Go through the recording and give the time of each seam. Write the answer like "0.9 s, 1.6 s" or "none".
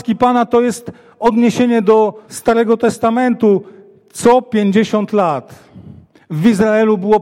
2.2 s